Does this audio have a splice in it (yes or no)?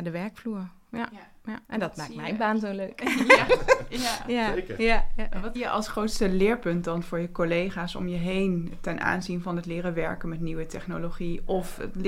yes